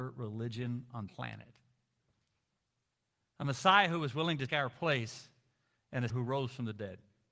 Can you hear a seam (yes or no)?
yes